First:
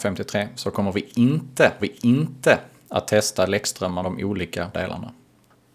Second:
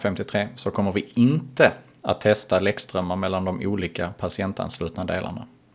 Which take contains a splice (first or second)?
first